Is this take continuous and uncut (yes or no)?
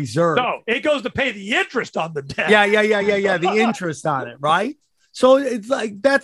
yes